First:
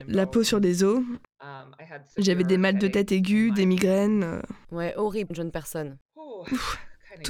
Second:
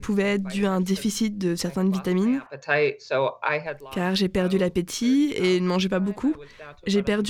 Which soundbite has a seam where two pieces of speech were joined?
first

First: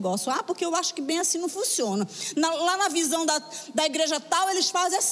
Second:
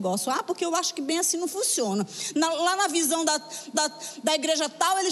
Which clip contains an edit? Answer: second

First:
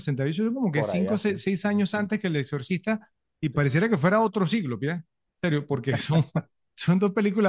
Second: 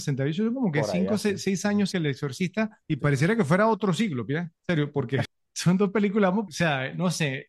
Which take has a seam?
second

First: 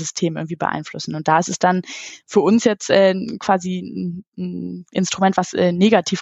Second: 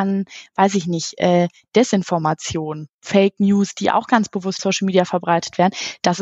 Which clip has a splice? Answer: second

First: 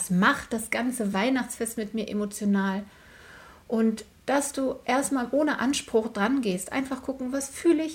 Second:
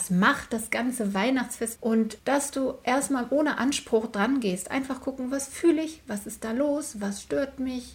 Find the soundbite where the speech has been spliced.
second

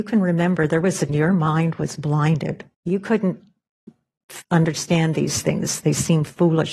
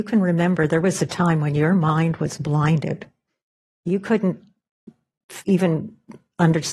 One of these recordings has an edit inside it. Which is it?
first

